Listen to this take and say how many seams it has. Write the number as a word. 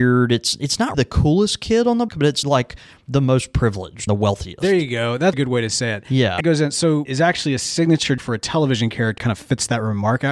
nine